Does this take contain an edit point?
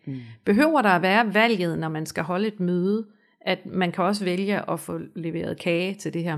no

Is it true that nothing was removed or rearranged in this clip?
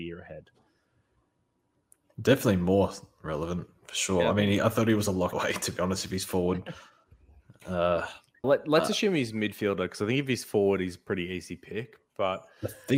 no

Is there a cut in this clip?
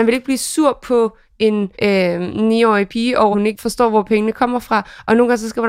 yes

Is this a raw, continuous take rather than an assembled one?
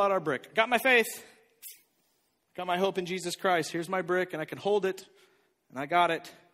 yes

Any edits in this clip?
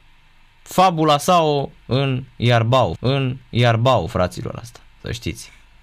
yes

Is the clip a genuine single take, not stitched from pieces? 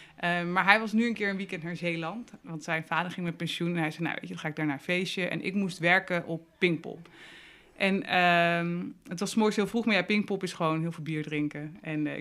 yes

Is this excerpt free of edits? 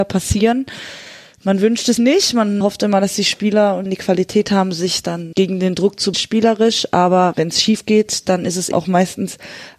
no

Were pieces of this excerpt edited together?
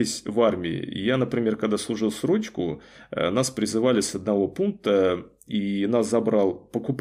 no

